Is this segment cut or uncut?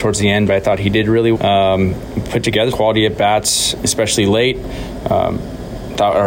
cut